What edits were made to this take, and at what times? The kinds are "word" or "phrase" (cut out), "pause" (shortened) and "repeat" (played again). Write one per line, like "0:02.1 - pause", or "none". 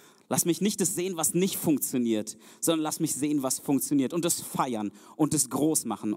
none